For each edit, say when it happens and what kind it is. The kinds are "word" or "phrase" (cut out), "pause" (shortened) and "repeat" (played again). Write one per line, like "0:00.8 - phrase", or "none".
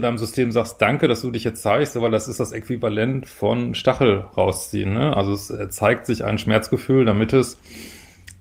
none

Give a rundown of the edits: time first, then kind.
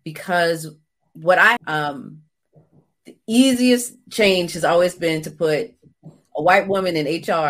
0:01.6 - phrase

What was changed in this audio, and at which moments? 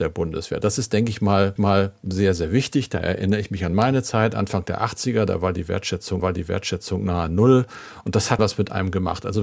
0:01.6 - repeat
0:06.2 - repeat
0:08.4 - word

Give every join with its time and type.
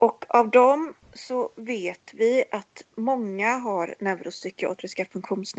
0:01.0 - pause

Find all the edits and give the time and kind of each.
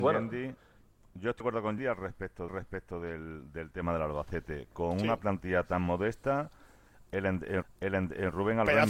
0:01.4 - word
0:01.8 - word
0:02.5 - repeat
0:07.6 - repeat

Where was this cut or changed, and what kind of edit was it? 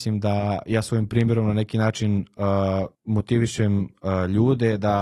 0:02.9 - pause

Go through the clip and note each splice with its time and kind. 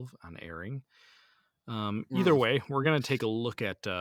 none

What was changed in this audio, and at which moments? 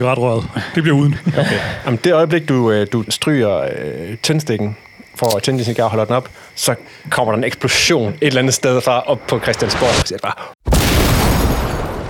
0:06.5 - pause

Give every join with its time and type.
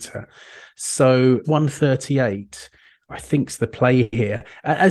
0:01.4 - phrase

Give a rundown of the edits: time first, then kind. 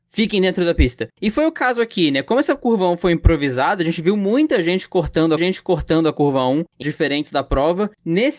0:05.4 - repeat
0:06.8 - word

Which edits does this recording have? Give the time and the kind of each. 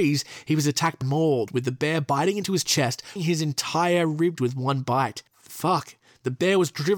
0:01.0 - phrase
0:03.2 - word
0:04.4 - word
0:05.3 - pause

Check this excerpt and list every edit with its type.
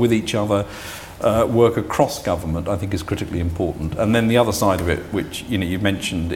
none

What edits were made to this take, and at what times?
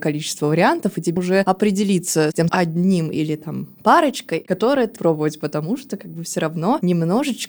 0:01.2 - word
0:02.5 - word
0:05.0 - word

